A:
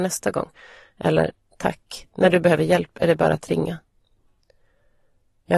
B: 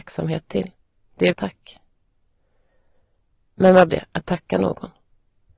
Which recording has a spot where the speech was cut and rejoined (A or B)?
B